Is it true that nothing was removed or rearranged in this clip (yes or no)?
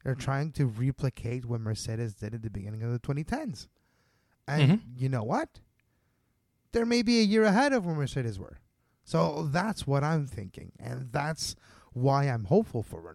yes